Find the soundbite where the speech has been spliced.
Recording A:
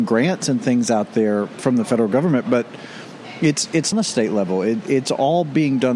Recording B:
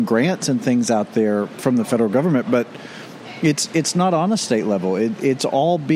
A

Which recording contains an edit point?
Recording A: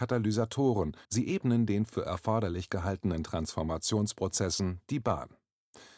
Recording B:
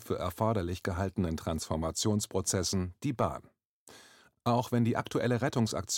A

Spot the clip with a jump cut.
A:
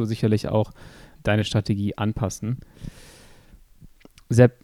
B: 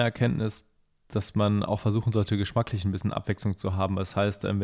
A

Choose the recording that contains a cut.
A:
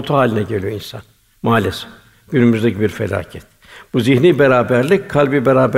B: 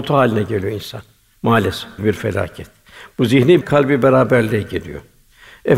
B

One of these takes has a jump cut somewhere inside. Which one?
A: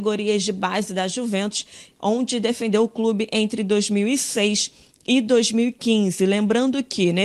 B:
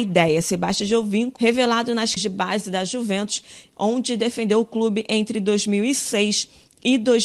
B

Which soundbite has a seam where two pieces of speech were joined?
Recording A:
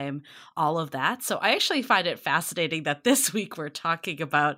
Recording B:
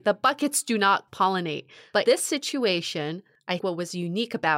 B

